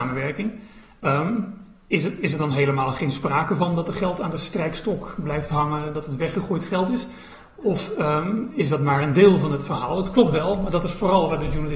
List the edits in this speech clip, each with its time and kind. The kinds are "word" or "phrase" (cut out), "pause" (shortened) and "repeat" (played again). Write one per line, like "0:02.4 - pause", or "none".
none